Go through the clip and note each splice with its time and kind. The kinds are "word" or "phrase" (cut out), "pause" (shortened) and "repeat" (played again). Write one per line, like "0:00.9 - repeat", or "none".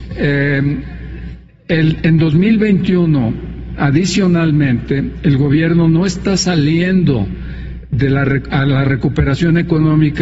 none